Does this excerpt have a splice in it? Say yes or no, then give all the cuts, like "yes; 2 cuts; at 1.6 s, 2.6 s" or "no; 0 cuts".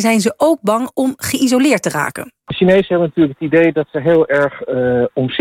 no; 0 cuts